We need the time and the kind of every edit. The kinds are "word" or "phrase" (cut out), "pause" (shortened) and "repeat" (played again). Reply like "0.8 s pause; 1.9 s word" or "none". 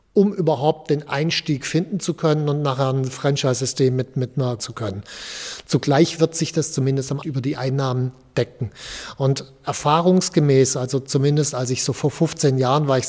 4.6 s phrase; 7.2 s phrase